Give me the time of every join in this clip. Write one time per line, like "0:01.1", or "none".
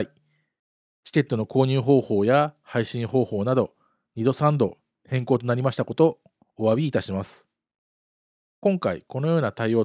none